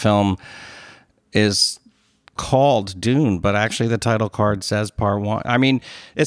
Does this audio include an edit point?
no; 0 cuts

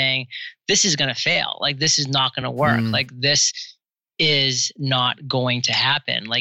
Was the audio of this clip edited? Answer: no; 0 cuts

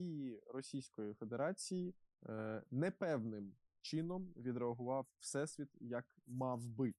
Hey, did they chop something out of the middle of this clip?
no; 0 cuts

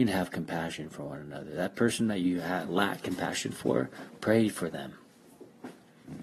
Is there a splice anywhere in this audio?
no; 0 cuts

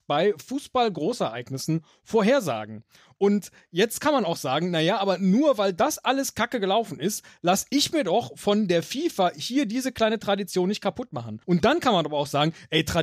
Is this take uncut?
no; 1 cut; at 11.4 s

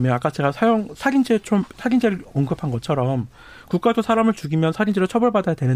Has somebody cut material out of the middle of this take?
yes; 1 cut; at 1.7 s

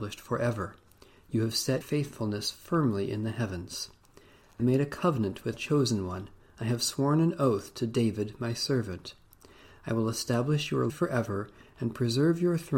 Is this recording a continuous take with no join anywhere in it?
no; 4 cuts; at 1.8 s, 4.6 s, 5.5 s, 10.9 s

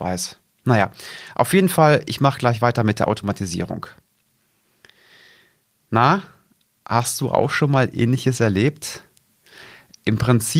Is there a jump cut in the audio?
no; 0 cuts

